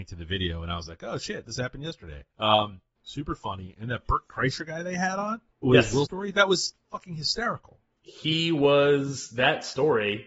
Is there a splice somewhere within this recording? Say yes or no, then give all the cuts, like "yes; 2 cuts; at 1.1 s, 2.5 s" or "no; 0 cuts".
yes; 5 cuts; at 1.5 s, 2.3 s, 5.5 s, 6.1 s, 7.9 s